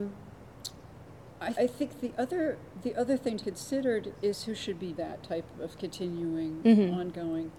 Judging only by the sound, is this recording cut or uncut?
cut